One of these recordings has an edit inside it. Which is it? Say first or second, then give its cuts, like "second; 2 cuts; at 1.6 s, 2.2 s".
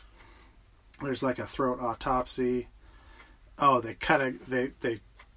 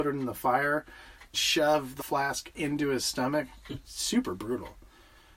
second; 2 cuts; at 1.3 s, 2.0 s